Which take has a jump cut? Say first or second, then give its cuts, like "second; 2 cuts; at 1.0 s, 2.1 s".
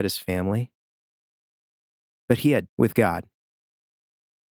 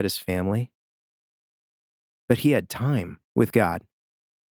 first; 1 cut; at 2.7 s